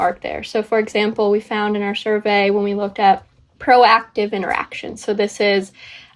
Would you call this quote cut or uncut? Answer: uncut